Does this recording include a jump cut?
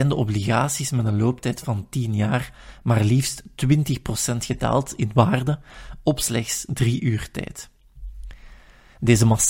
no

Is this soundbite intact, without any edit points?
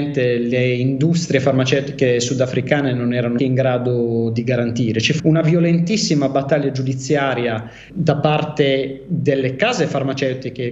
no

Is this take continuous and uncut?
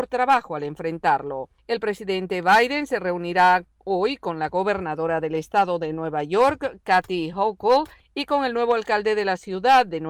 yes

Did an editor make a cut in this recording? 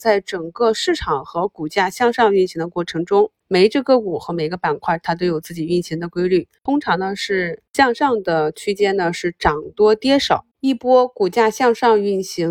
yes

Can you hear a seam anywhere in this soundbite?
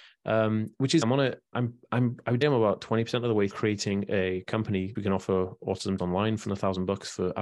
yes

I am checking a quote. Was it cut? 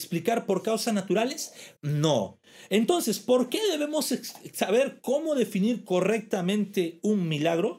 yes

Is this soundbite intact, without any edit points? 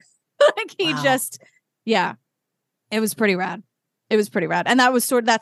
yes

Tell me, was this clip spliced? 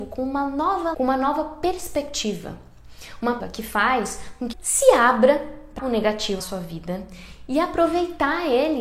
yes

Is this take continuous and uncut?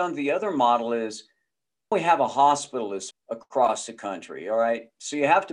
no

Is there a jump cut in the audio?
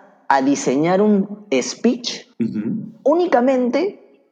yes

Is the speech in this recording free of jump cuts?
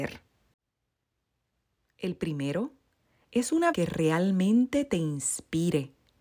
no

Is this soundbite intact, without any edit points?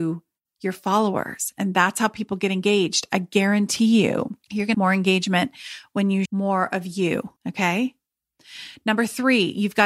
no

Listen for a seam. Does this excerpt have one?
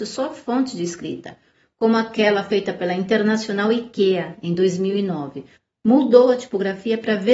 no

